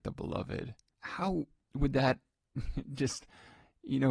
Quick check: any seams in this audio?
no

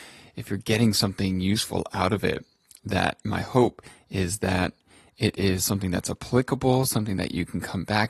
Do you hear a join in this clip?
no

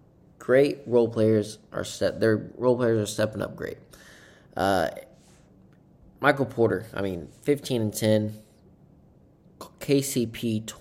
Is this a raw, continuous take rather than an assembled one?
yes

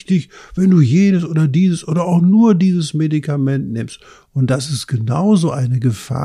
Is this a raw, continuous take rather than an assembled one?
yes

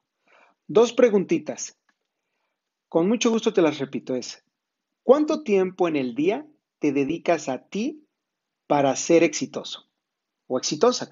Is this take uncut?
yes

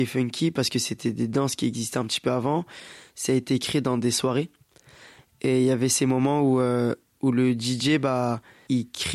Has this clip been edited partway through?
no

